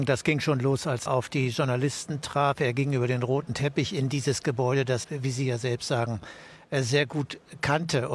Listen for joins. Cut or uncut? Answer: cut